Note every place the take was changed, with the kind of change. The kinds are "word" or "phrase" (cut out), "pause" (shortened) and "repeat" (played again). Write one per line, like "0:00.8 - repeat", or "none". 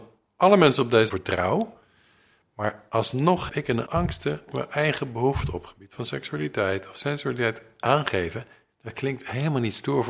0:01.1 - word
0:03.5 - word
0:03.9 - word
0:04.5 - word